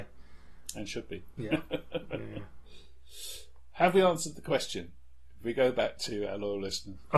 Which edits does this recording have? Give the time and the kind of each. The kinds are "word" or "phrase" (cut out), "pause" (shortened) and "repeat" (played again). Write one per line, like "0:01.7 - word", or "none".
none